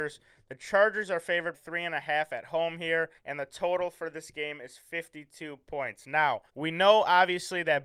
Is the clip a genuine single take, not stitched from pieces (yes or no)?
no